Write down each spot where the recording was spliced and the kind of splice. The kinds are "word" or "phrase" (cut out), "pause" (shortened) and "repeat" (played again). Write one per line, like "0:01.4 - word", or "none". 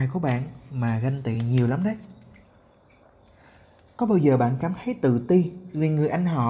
none